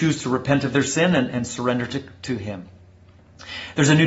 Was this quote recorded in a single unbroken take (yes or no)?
yes